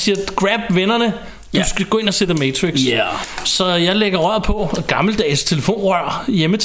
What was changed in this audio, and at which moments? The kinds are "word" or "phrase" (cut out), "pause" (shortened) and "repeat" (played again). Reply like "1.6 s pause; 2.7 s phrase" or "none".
none